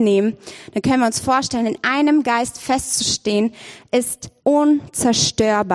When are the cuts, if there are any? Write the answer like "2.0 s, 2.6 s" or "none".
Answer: 4.4 s